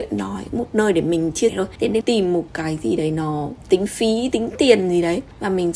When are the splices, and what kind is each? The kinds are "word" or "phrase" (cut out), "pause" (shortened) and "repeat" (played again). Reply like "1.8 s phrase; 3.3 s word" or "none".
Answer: 1.5 s word; 2.0 s phrase